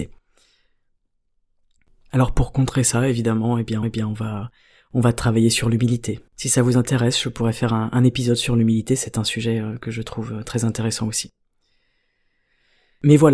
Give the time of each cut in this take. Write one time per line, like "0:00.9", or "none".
0:03.8
0:06.3